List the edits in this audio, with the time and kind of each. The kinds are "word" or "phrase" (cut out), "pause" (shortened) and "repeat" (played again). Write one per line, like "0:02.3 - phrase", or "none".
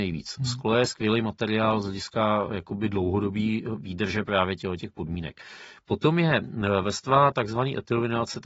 none